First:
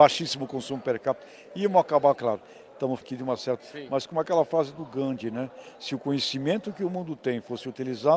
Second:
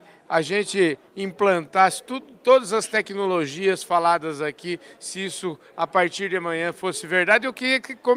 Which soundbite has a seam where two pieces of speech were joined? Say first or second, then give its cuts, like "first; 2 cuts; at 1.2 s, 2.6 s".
first; 3 cuts; at 2.1 s, 3.0 s, 3.6 s